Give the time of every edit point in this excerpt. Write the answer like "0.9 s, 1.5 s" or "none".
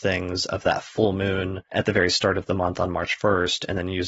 1.7 s